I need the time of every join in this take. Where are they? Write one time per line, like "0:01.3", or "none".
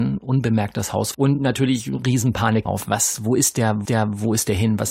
0:01.1
0:02.7
0:03.9